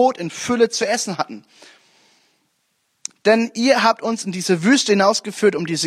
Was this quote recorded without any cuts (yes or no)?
yes